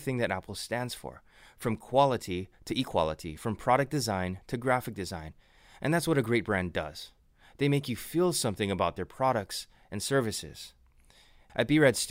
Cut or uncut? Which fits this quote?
uncut